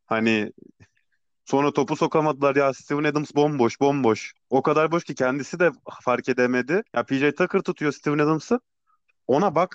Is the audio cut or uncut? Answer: cut